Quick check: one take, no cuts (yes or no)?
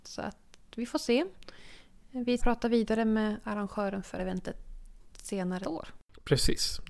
no